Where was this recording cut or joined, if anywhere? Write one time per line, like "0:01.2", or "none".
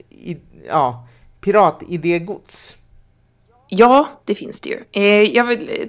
none